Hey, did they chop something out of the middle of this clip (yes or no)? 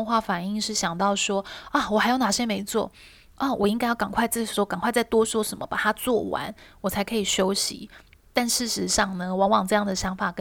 no